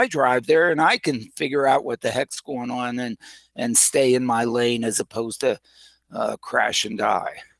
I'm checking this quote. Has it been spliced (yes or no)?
no